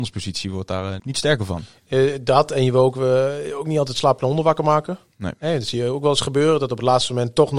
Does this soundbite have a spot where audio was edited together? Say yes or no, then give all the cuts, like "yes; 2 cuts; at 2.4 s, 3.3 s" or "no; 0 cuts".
yes; 1 cut; at 1.0 s